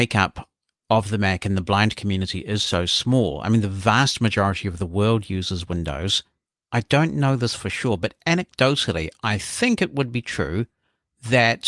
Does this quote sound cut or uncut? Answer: uncut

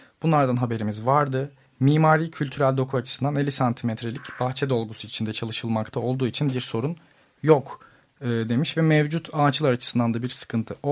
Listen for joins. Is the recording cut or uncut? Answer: uncut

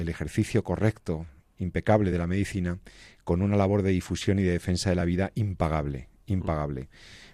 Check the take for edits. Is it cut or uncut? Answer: uncut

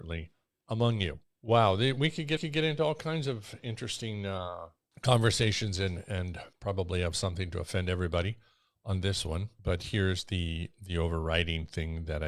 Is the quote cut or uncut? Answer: cut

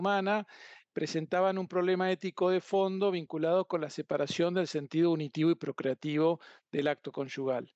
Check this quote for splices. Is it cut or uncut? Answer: uncut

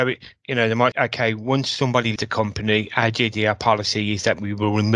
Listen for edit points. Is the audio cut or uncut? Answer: cut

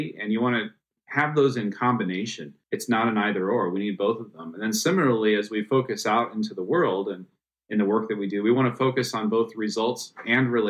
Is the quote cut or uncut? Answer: cut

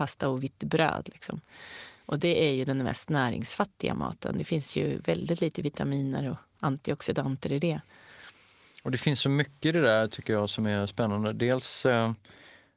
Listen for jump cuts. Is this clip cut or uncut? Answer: uncut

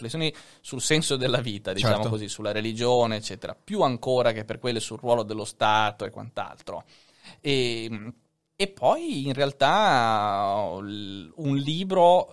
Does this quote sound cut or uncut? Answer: cut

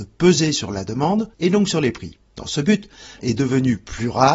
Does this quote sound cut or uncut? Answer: cut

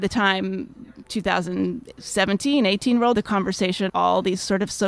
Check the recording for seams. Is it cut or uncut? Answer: cut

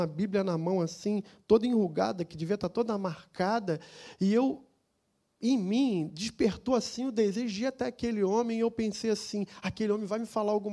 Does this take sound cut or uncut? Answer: uncut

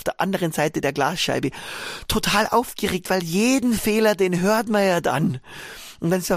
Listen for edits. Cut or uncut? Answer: uncut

